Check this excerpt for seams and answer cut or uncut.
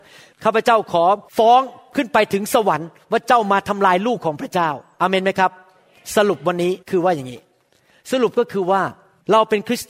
cut